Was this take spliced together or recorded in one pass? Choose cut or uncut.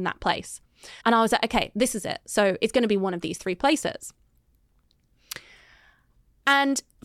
cut